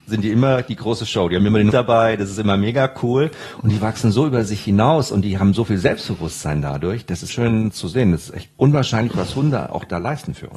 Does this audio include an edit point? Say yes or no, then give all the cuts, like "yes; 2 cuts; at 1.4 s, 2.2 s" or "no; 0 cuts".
yes; 3 cuts; at 1.7 s, 7.3 s, 8.5 s